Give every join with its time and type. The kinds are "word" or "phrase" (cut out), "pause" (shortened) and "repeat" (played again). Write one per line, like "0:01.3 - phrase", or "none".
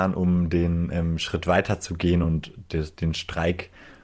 none